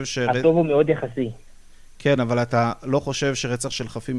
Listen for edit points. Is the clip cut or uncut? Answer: uncut